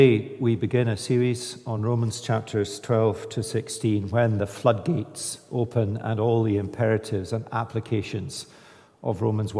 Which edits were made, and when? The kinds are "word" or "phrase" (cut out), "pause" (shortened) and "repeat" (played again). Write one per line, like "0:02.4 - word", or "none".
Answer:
none